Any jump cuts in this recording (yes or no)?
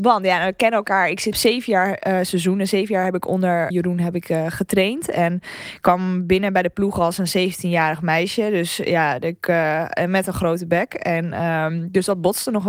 yes